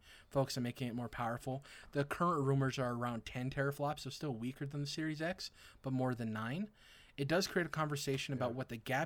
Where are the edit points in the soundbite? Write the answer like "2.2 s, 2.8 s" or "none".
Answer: none